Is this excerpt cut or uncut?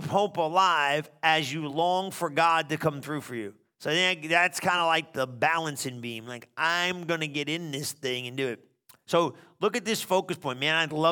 uncut